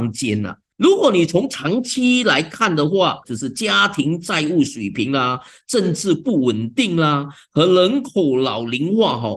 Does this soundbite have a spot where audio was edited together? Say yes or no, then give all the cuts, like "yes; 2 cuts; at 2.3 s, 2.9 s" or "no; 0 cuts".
no; 0 cuts